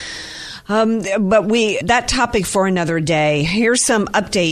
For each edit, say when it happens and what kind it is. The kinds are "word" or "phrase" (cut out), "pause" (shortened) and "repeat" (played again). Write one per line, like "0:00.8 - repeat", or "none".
0:01.8 - word